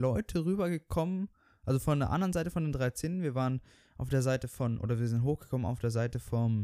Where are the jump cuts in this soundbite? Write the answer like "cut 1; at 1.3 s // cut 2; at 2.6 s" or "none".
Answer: none